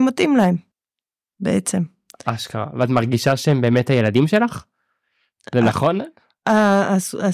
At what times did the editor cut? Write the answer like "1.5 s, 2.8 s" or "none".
none